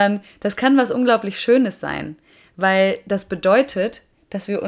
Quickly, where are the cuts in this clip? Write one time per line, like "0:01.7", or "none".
none